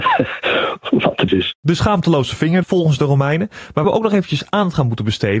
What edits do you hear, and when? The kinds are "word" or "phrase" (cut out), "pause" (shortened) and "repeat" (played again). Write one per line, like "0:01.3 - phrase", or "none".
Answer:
0:01.3 - word
0:02.6 - word
0:03.8 - word